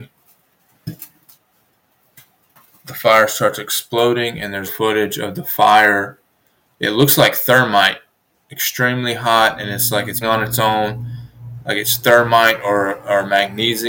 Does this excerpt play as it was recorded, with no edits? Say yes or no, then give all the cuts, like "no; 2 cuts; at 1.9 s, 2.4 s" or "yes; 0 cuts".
no; 2 cuts; at 4.7 s, 10.2 s